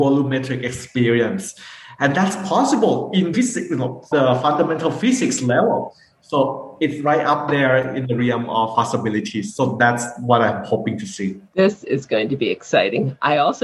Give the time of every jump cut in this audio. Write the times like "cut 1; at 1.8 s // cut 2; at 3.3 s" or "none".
cut 1; at 3.3 s // cut 2; at 4.1 s // cut 3; at 8.7 s // cut 4; at 11.5 s